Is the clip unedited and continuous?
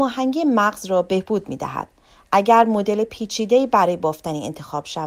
yes; 0 cuts

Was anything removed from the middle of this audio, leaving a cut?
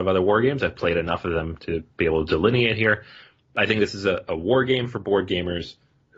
yes; 1 cut; at 1.9 s

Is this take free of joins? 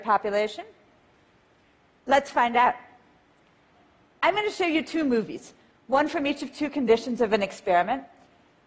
yes; 0 cuts

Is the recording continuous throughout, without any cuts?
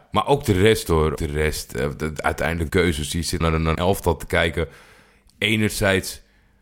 no; 4 cuts; at 1.2 s, 2.7 s, 3.4 s, 3.8 s

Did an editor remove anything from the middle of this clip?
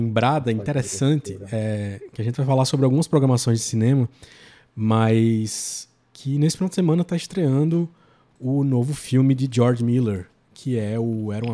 no; 0 cuts

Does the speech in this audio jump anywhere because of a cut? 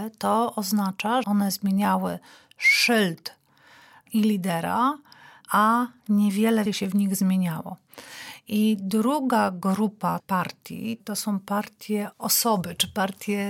yes; 3 cuts; at 1.2 s, 6.7 s, 10.2 s

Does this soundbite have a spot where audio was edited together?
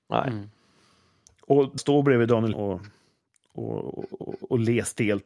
yes; 3 cuts; at 1.8 s, 2.5 s, 4.2 s

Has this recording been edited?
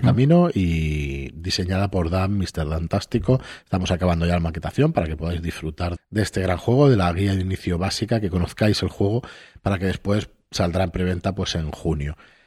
yes; 1 cut; at 6.0 s

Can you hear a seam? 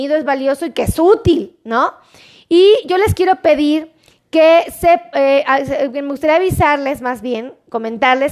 no; 0 cuts

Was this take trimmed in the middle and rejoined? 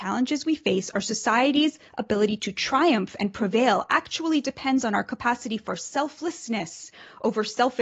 no; 0 cuts

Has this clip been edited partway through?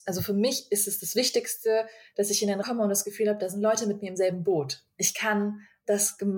yes; 1 cut; at 2.6 s

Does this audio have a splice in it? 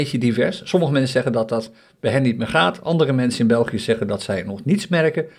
no; 0 cuts

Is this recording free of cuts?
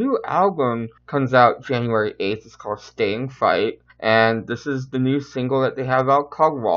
no; 2 cuts; at 1.0 s, 3.9 s

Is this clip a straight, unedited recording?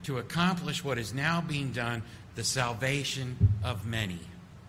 yes; 0 cuts

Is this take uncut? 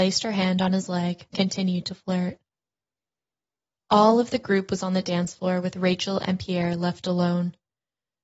no; 1 cut; at 1.3 s

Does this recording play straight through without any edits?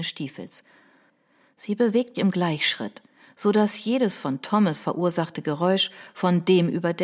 no; 1 cut; at 2.1 s

